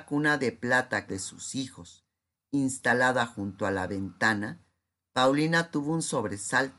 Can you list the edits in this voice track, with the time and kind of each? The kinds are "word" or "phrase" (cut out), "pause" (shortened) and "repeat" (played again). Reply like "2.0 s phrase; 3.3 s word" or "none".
1.1 s phrase